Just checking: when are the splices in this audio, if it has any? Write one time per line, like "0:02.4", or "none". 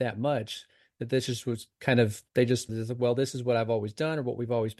0:02.3
0:02.7

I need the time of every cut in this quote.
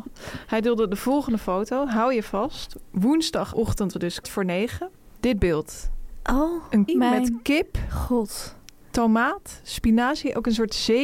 0:03.9
0:04.2
0:06.9

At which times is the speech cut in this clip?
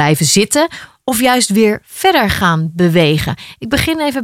none

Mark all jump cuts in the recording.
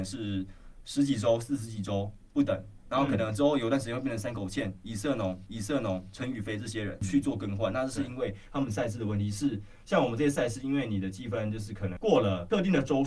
0:05.5

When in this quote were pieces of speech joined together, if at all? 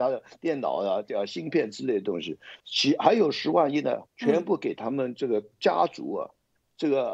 0:02.6
0:04.1

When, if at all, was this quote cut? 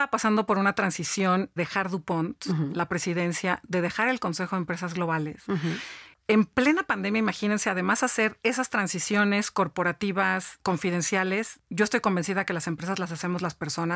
0:01.6

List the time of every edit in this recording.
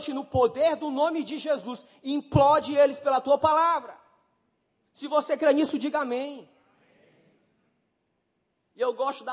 none

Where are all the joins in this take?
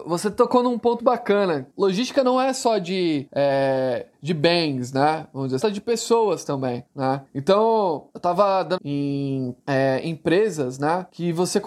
0:01.0
0:05.6
0:08.8

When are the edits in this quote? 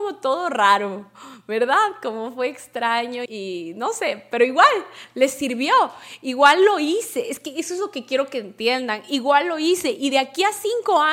0:03.3

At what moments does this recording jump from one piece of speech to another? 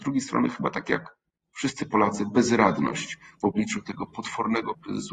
none

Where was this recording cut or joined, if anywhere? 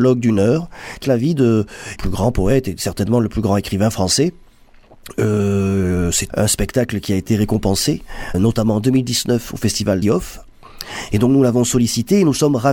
0:01.0
0:02.0
0:06.3
0:08.3
0:10.0

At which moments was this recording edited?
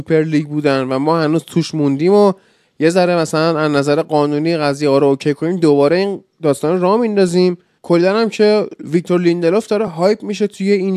none

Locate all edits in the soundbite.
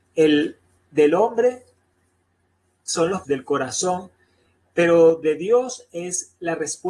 0:03.2

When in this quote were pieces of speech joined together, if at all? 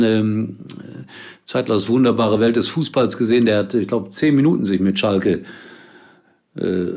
none

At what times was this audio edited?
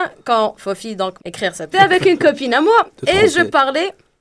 0:01.2
0:01.7

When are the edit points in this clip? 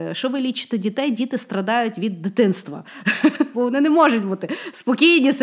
0:03.5

